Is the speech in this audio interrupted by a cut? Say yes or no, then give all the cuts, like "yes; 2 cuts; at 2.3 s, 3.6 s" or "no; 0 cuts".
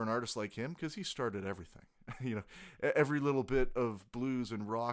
no; 0 cuts